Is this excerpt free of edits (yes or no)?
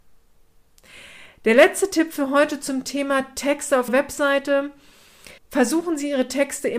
no